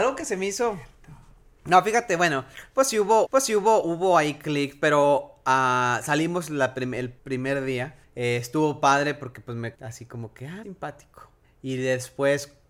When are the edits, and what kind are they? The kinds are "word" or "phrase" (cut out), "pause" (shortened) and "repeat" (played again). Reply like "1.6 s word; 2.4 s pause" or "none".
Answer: 3.3 s repeat; 7.2 s pause; 8.0 s pause; 9.7 s phrase; 10.6 s phrase; 11.4 s pause